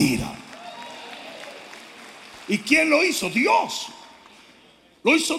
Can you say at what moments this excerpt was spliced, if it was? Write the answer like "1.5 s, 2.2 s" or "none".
none